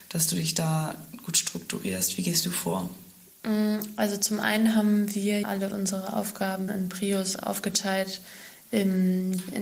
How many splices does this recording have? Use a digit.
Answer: 2